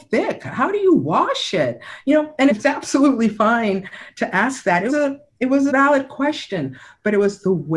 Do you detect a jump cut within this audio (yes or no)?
yes